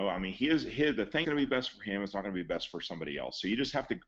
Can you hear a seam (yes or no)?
yes